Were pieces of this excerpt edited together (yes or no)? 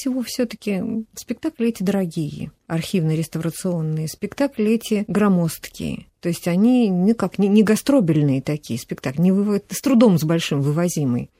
no